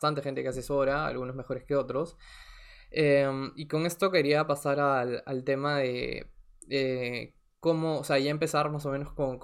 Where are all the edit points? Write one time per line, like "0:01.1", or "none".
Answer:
none